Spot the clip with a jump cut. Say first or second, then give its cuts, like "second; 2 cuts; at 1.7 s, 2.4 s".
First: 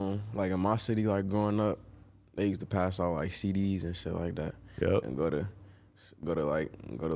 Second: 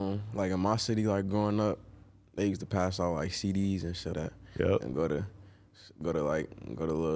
second; 1 cut; at 4.1 s